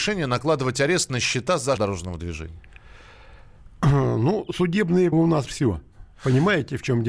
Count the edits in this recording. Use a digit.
3